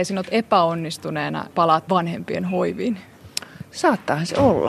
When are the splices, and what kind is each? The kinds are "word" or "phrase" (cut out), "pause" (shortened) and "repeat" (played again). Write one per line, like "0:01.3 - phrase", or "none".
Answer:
0:01.5 - word
0:01.9 - word